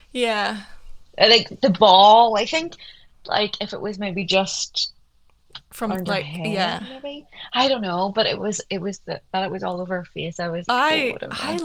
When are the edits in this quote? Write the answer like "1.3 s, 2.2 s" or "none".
10.7 s